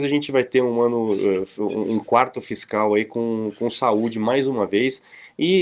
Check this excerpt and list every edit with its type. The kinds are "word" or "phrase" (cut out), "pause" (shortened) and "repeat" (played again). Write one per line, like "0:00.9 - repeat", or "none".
none